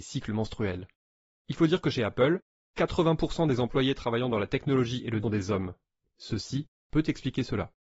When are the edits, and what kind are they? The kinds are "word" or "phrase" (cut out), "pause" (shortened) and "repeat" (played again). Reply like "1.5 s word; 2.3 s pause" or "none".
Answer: 5.2 s phrase